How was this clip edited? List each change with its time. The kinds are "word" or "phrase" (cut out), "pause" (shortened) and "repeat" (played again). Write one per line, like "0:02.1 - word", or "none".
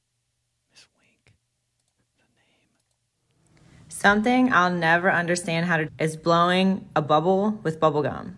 0:05.9 - word